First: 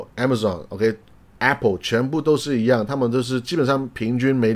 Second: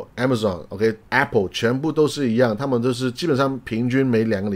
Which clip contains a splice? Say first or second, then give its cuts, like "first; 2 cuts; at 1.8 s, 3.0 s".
second; 1 cut; at 1.1 s